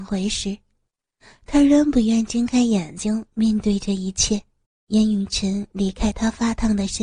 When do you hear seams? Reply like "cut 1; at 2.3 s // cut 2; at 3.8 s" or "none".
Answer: cut 1; at 4.6 s